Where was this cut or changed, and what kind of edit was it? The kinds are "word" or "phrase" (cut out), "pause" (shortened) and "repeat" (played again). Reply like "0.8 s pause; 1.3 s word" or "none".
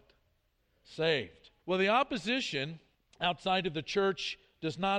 1.6 s pause; 2.9 s pause

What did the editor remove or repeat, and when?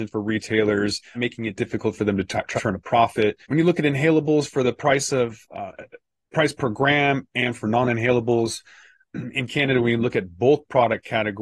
1.1 s phrase; 2.6 s word; 3.4 s pause

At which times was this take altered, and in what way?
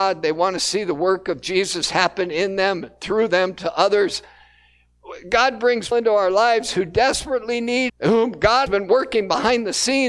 5.9 s word; 7.9 s word; 8.7 s word

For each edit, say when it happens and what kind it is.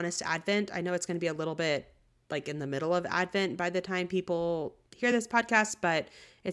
none

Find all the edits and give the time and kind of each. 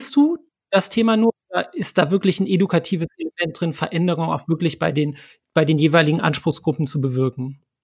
none

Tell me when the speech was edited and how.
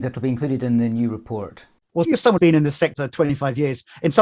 2.0 s word; 2.4 s word

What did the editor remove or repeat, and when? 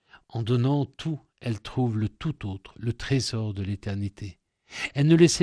none

